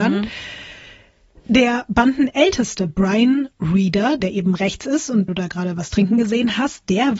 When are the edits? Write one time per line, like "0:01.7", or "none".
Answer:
0:04.2
0:05.3